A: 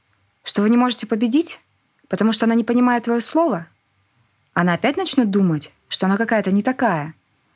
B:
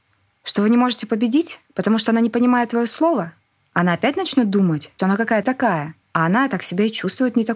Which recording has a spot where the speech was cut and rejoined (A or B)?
B